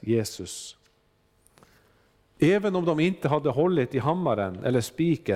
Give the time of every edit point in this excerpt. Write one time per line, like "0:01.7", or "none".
none